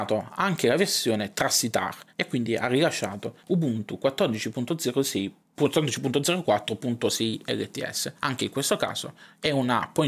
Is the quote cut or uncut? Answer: cut